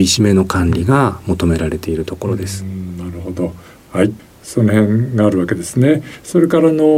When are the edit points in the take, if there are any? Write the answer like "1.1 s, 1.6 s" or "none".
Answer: none